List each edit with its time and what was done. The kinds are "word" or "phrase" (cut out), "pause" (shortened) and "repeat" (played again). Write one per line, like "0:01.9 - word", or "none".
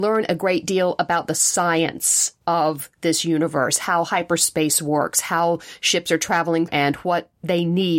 0:02.4 - pause
0:06.7 - word

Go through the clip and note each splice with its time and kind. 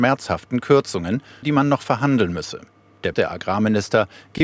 0:01.4 - word
0:03.1 - word

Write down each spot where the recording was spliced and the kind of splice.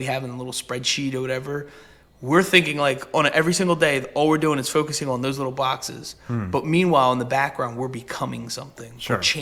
none

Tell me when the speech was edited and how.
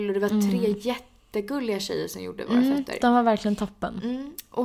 none

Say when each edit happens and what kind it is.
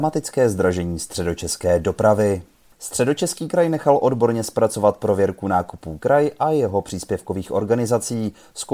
none

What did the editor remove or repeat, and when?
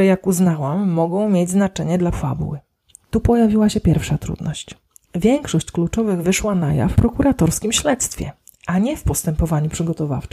0:02.1 - word
0:06.2 - word
0:06.9 - word

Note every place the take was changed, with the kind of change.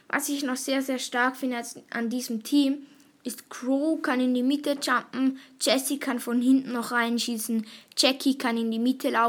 none

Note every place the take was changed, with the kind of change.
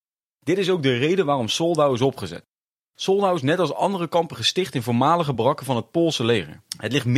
none

